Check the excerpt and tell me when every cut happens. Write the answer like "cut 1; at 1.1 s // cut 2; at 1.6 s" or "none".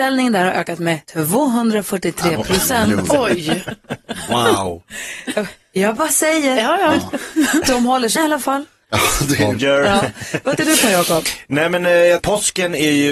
cut 1; at 1.0 s // cut 2; at 8.2 s // cut 3; at 9.6 s // cut 4; at 10.6 s // cut 5; at 12.2 s